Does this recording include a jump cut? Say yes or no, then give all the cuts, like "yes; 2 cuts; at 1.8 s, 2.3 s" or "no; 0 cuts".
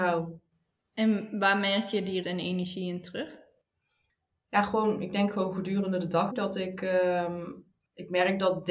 yes; 2 cuts; at 2.2 s, 6.3 s